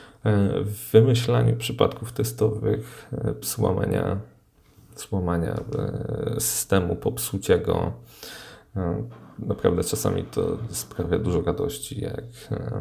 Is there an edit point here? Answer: yes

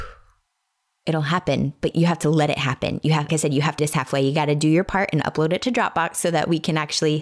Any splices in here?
yes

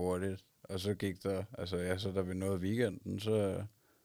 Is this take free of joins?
yes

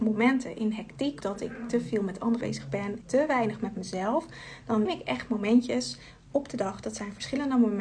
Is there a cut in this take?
yes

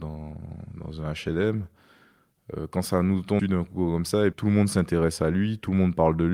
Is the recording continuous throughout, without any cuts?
no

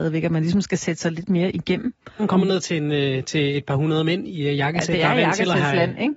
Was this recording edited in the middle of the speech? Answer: no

